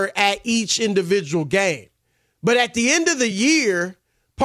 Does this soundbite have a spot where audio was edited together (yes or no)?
no